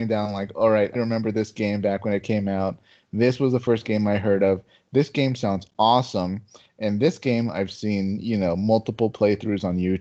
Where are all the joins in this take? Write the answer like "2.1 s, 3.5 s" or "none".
1.0 s